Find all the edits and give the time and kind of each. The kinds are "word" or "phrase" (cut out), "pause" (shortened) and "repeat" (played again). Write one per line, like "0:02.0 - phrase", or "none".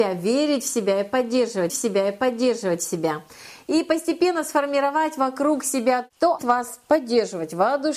0:01.7 - repeat
0:06.4 - phrase